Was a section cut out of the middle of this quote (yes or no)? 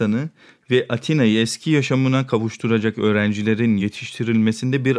no